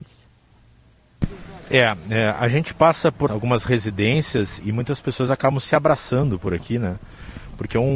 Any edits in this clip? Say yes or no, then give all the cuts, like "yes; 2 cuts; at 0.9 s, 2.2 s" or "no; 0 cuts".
yes; 2 cuts; at 3.3 s, 4.6 s